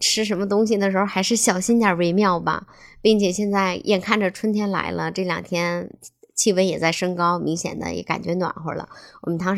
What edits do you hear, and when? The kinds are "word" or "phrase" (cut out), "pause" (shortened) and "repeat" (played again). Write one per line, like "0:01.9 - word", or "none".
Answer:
none